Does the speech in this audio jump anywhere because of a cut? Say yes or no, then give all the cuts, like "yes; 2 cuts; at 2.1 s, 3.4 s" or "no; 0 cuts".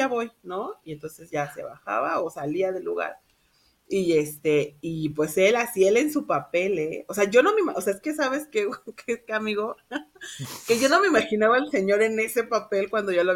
no; 0 cuts